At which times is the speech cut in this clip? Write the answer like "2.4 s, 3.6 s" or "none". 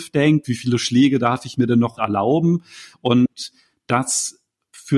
2.0 s

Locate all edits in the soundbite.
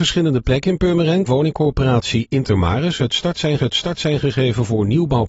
1.3 s, 3.6 s

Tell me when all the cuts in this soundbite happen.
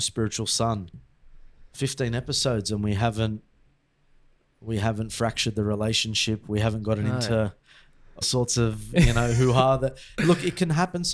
8.2 s

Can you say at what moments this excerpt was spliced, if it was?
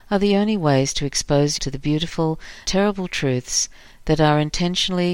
1.6 s, 2.6 s

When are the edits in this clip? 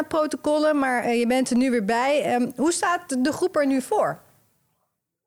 none

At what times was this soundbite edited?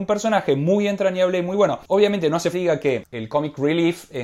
2.5 s

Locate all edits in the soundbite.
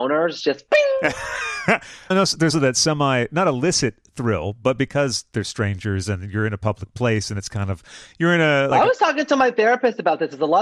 2.1 s, 2.5 s, 8.7 s

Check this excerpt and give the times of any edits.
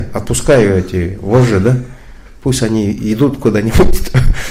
none

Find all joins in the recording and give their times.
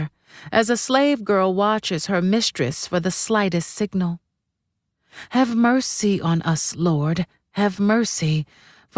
none

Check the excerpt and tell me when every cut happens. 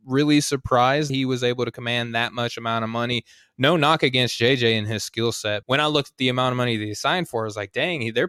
1.1 s, 5.6 s

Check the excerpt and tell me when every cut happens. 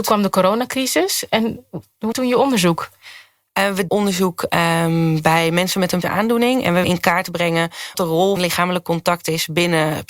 2.1 s, 3.9 s, 6.0 s, 6.8 s, 7.9 s, 8.4 s

